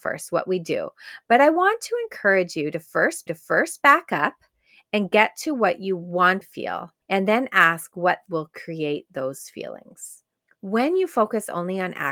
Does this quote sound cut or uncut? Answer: cut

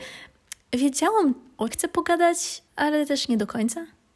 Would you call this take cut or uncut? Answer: cut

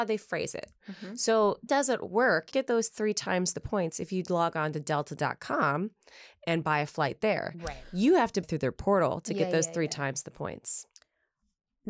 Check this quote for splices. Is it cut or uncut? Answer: cut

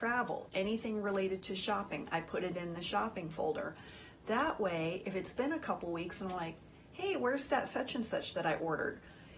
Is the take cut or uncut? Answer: uncut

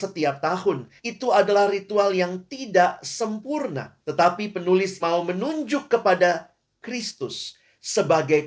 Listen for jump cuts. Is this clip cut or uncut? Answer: cut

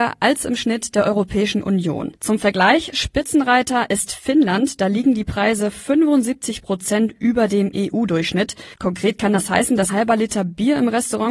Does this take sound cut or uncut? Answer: cut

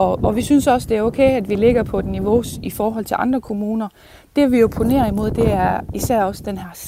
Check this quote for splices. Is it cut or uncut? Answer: uncut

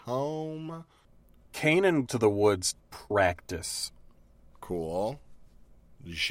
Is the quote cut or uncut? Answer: cut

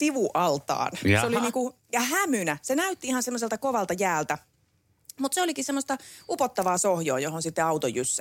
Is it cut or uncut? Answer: uncut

